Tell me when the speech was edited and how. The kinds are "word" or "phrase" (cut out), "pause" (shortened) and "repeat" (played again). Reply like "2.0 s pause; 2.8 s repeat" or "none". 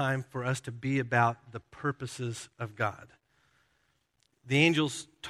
none